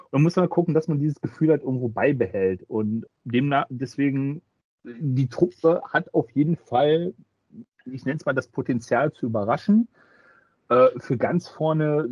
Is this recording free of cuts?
no; 2 cuts; at 3.1 s, 4.5 s

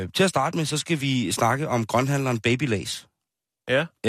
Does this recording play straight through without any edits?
yes; 0 cuts

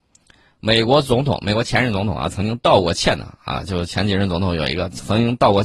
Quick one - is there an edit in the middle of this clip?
no; 0 cuts

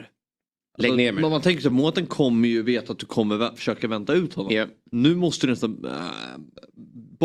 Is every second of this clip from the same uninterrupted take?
yes; 0 cuts

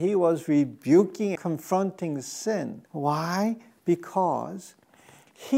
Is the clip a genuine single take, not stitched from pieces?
no; 2 cuts; at 1.4 s, 2.9 s

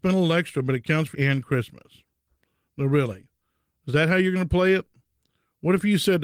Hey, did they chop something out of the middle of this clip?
yes; 1 cut; at 1.1 s

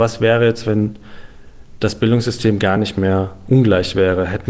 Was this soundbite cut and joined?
no; 0 cuts

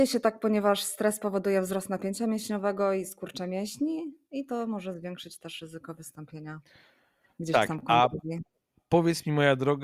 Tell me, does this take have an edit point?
no; 0 cuts

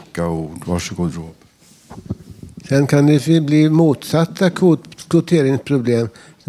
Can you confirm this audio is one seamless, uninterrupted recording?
yes; 0 cuts

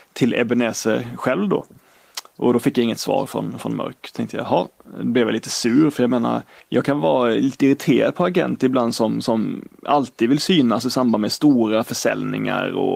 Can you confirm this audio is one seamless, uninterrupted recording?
no; 1 cut; at 6.6 s

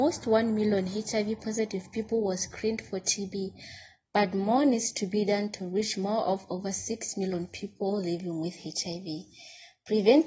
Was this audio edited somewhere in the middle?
no; 0 cuts

